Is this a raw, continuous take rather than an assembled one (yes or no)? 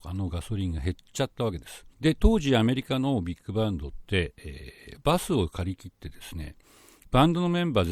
no